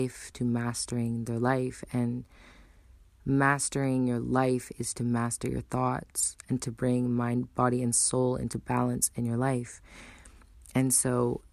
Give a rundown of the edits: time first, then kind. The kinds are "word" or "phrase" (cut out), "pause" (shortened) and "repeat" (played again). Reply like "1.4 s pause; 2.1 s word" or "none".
none

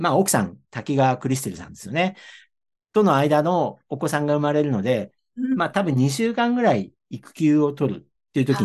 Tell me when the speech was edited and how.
7.0 s pause

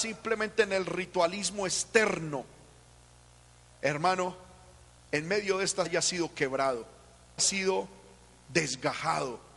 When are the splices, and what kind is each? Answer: 5.8 s word; 7.4 s word

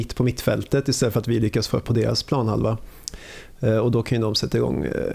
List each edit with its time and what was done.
1.8 s word

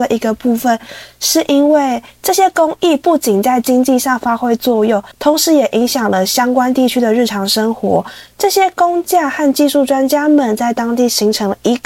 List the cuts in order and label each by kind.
5.1 s pause

